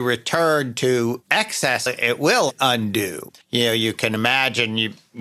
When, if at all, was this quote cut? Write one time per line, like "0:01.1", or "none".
0:01.9
0:03.4